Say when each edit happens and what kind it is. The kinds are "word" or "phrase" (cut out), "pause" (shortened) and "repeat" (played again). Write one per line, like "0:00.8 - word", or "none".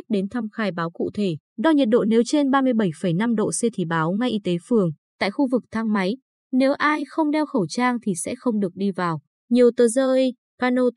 none